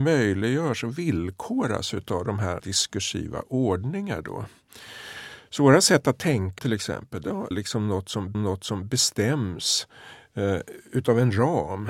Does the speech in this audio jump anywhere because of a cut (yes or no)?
yes